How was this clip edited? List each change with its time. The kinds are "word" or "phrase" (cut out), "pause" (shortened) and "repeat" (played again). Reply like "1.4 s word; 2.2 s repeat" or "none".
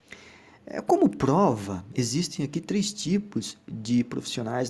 none